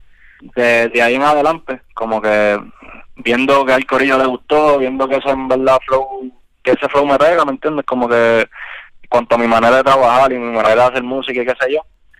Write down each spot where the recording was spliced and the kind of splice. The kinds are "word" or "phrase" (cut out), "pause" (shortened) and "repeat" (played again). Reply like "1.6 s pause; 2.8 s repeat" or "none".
none